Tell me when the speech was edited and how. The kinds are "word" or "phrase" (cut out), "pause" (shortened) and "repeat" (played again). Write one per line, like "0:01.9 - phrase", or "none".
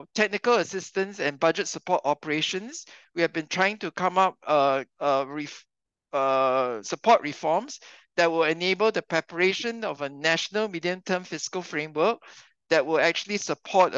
0:04.9 - pause